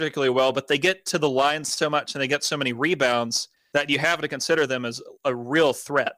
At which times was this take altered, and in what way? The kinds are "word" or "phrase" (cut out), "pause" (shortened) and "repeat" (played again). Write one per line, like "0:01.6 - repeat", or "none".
0:03.5 - pause